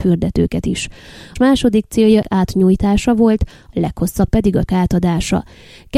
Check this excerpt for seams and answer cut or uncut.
cut